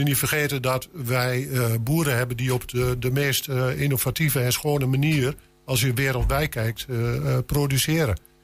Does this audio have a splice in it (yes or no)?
no